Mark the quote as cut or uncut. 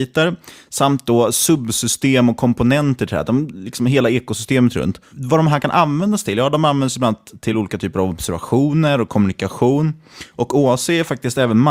uncut